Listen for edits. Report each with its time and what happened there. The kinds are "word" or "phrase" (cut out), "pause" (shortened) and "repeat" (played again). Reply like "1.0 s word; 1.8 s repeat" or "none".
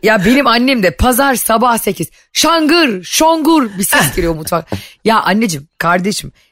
none